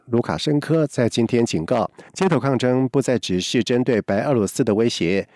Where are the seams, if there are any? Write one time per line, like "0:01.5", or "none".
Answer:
0:02.1